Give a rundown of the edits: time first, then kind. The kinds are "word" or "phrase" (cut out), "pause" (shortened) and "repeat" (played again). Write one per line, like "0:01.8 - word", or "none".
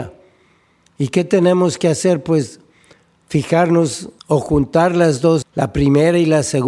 0:04.2 - pause
0:05.4 - word